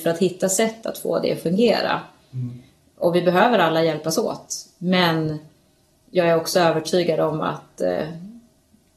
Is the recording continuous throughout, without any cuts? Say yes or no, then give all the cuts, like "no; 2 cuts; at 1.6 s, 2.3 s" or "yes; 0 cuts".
yes; 0 cuts